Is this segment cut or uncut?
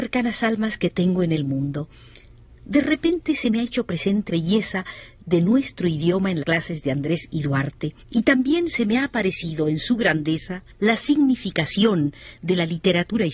cut